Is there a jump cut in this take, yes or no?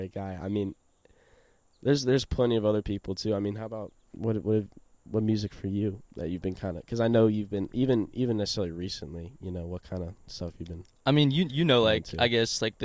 no